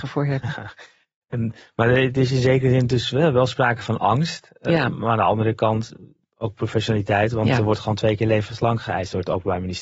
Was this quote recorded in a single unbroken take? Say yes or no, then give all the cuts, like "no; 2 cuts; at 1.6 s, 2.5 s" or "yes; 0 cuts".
yes; 0 cuts